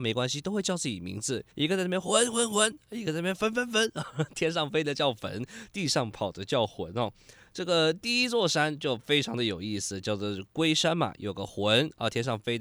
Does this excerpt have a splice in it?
yes; 1 cut; at 1.5 s

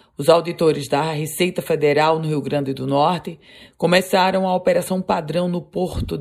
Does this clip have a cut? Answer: no; 0 cuts

